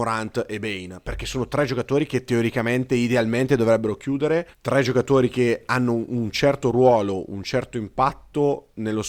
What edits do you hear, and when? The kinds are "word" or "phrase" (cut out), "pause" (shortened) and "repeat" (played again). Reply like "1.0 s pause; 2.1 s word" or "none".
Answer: 4.5 s pause